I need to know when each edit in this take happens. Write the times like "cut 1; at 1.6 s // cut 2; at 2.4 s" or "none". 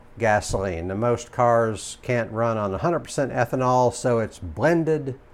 none